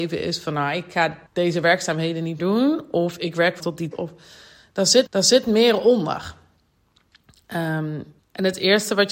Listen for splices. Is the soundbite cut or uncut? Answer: cut